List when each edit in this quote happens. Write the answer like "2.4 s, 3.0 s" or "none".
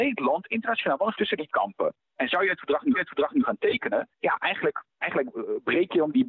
1.1 s, 1.5 s, 2.0 s, 2.9 s, 4.1 s, 4.9 s